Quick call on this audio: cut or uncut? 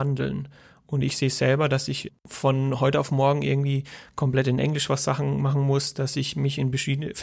uncut